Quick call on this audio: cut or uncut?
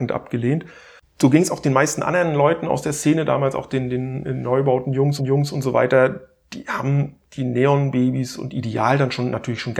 cut